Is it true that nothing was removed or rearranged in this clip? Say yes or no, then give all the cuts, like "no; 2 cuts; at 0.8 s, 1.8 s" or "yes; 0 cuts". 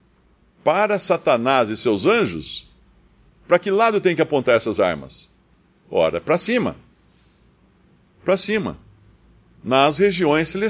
yes; 0 cuts